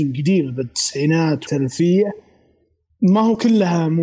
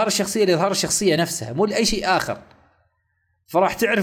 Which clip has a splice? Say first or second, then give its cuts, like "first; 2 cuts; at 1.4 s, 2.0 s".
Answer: first; 1 cut; at 1.5 s